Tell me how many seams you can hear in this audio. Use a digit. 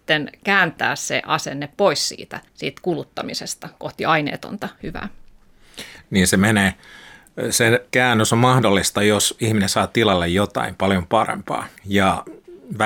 3